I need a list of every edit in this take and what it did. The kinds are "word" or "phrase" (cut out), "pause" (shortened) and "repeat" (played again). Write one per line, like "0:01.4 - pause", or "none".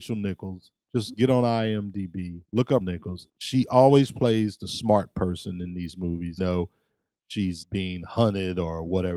0:02.4 - pause
0:02.8 - word
0:03.3 - pause
0:06.4 - word
0:07.6 - word